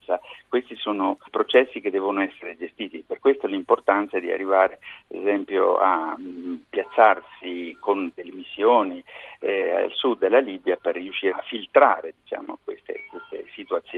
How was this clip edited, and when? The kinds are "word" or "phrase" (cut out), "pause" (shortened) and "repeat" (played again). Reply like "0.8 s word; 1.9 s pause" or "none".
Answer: 1.3 s word; 8.1 s word; 11.3 s word